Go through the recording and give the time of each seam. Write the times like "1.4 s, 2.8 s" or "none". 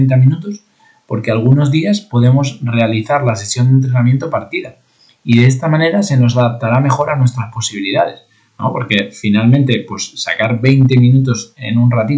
none